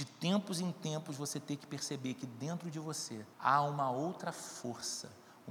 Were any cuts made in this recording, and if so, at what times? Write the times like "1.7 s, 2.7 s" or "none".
3.3 s